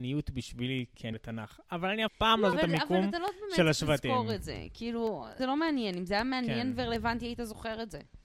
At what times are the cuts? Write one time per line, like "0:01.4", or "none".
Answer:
0:01.1
0:02.1
0:02.5
0:05.4